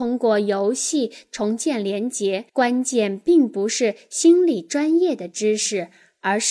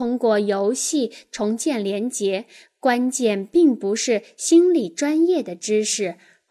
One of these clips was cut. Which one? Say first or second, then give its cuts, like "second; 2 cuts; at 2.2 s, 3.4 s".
first; 1 cut; at 2.5 s